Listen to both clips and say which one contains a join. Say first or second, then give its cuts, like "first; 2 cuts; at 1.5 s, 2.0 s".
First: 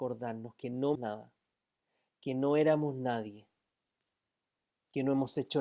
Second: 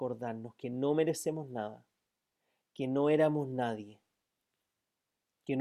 first; 1 cut; at 0.9 s